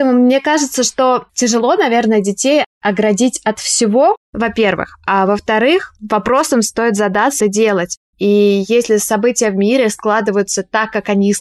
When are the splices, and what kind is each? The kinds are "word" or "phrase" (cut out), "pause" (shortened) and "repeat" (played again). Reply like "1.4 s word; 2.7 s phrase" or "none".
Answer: 1.3 s word; 6.0 s pause; 7.4 s phrase